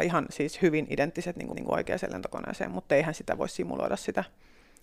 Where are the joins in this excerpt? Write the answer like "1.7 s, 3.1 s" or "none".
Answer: 1.5 s